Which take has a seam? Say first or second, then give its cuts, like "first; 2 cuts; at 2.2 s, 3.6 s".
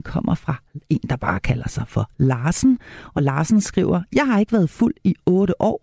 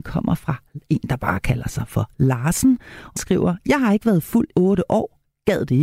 second; 2 cuts; at 3.2 s, 4.5 s